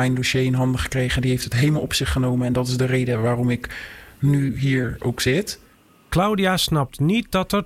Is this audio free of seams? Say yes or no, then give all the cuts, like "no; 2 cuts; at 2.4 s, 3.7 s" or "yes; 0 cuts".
yes; 0 cuts